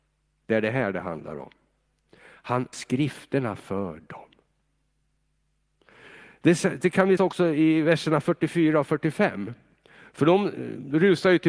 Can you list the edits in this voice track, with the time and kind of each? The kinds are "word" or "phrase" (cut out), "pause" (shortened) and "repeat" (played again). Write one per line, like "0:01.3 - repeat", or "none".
0:02.7 - word
0:07.2 - word